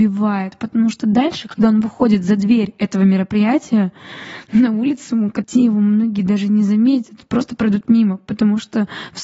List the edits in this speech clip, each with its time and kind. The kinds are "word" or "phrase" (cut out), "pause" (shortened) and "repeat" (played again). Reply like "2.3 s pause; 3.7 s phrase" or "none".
5.4 s word